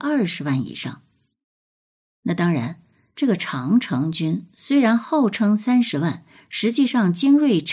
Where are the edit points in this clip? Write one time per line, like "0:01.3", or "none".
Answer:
none